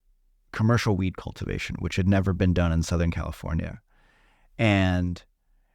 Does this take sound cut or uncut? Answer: uncut